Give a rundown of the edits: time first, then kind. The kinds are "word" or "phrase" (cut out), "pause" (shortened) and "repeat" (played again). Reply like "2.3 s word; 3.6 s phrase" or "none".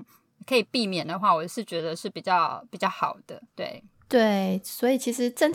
3.5 s pause